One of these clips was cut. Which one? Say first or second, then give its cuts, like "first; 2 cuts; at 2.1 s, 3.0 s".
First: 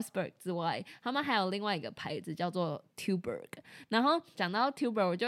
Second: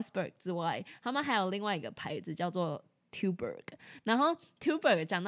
first; 2 cuts; at 2.9 s, 4.3 s